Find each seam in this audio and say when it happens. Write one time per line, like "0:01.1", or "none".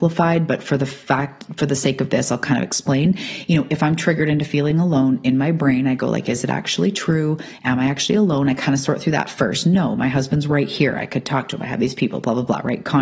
none